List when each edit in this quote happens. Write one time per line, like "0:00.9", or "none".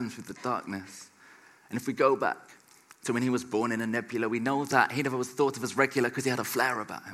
none